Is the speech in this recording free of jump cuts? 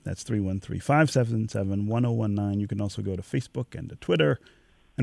yes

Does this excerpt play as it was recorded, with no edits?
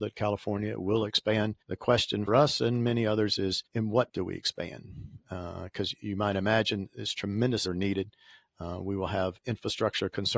no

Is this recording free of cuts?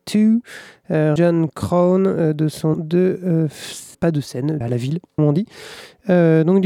no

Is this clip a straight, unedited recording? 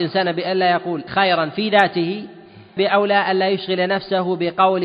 no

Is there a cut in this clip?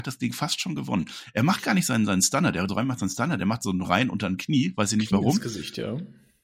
yes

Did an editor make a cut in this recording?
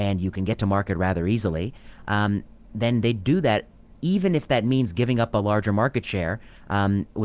no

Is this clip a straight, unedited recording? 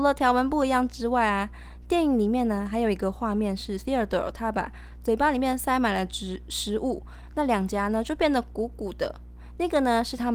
yes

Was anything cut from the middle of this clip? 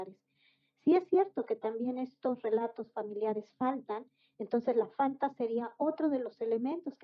no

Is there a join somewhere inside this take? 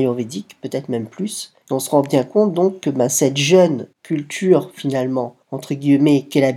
yes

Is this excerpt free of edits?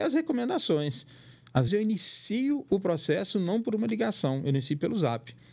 no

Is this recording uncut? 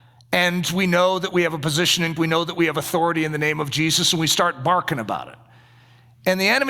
no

